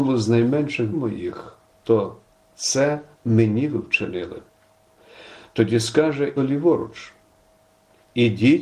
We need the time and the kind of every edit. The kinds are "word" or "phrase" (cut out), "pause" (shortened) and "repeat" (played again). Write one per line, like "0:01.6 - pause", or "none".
0:00.9 - word
0:01.7 - pause
0:03.1 - pause
0:06.4 - phrase